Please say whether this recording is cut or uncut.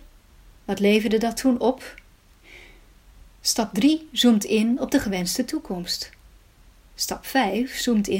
uncut